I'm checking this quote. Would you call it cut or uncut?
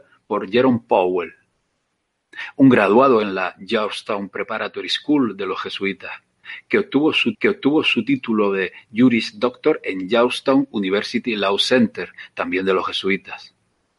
cut